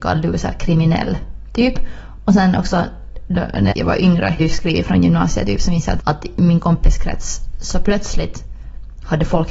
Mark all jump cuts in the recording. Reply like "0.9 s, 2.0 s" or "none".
3.7 s, 4.4 s, 6.0 s